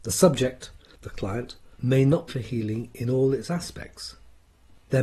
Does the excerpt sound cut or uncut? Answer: cut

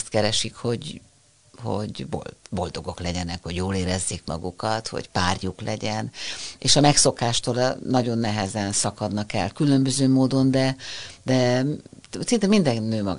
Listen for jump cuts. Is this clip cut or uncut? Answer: uncut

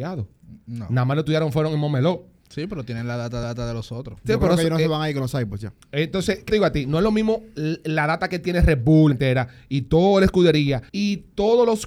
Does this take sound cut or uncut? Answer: cut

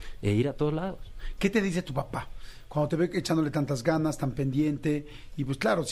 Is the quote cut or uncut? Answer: uncut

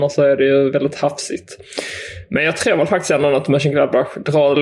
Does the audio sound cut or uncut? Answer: uncut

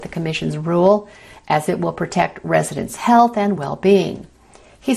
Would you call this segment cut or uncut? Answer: uncut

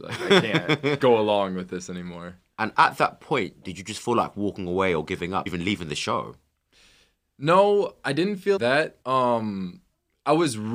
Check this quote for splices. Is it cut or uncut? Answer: cut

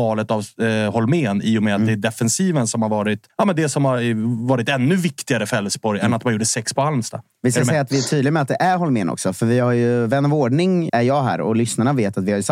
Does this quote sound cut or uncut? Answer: cut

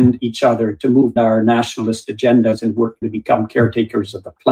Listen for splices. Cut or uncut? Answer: cut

